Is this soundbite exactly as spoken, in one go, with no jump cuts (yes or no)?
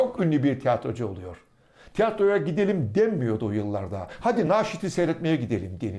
yes